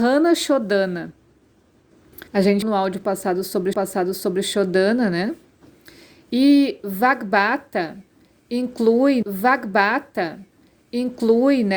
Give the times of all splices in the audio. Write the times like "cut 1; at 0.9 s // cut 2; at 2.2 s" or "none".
cut 1; at 2.3 s // cut 2; at 2.6 s // cut 3; at 3.7 s // cut 4; at 9.2 s